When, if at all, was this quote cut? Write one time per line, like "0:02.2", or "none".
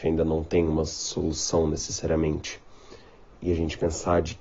none